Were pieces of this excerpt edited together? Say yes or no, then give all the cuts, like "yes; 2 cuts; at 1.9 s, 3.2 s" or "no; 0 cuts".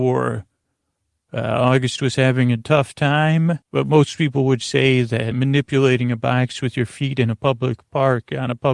yes; 2 cuts; at 3.6 s, 5.3 s